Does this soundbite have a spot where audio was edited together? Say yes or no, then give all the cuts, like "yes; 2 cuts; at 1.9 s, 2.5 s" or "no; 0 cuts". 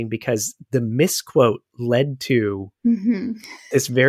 yes; 1 cut; at 2.8 s